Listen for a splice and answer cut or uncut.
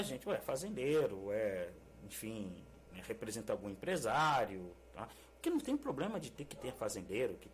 uncut